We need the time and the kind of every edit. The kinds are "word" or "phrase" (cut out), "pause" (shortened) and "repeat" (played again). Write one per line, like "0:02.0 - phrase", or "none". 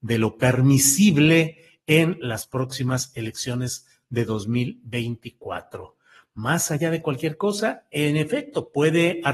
none